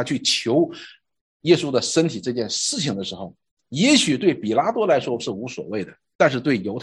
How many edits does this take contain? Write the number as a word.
zero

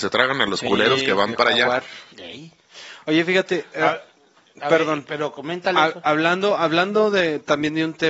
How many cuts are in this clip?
zero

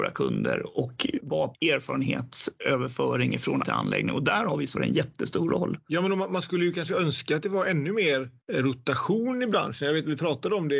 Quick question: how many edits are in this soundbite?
three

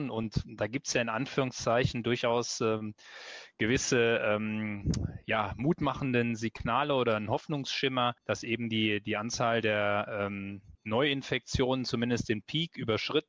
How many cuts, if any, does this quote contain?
two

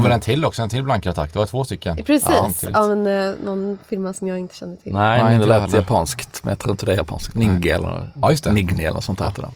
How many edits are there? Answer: zero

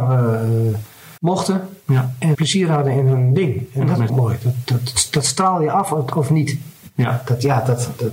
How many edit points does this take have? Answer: three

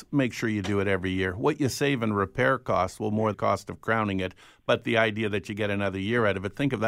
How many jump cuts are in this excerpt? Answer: one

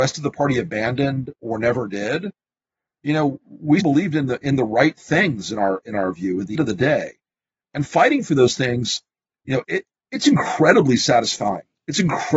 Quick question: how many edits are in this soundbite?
three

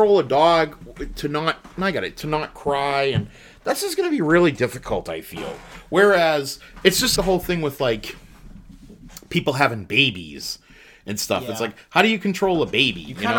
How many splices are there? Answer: one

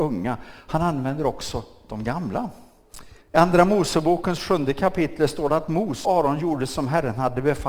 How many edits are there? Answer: two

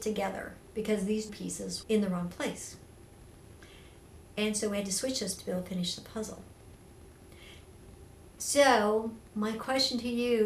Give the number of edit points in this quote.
three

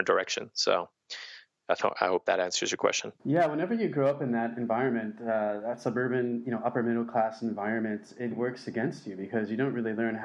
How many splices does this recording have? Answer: two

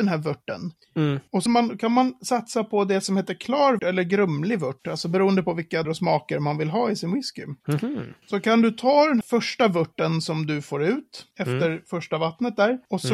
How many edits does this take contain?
four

